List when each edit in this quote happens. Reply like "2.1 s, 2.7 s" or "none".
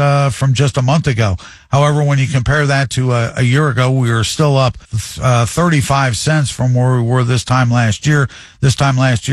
4.8 s